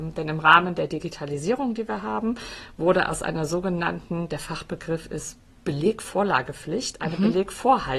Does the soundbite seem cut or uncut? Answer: uncut